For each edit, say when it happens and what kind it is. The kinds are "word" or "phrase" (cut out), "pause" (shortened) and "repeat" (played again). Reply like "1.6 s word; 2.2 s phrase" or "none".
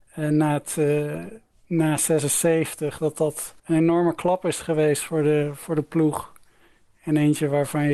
1.5 s pause; 3.6 s pause